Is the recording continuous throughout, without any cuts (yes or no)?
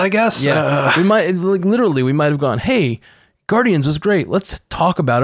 yes